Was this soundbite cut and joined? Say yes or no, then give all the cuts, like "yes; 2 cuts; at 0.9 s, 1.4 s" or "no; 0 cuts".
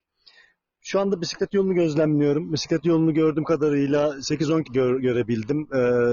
yes; 1 cut; at 4.6 s